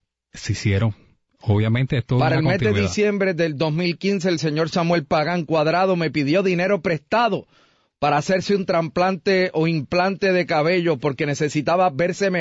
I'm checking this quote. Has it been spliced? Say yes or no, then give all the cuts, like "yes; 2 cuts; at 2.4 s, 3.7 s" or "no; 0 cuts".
no; 0 cuts